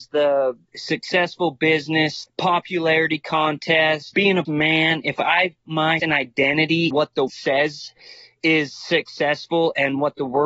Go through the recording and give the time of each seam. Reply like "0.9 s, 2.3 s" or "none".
2.3 s, 4.1 s, 4.5 s, 5.7 s, 6.0 s, 6.9 s, 7.3 s